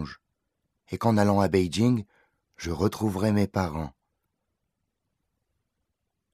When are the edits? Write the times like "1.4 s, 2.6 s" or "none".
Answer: none